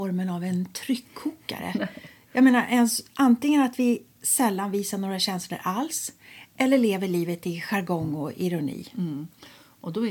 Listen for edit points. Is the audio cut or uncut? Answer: uncut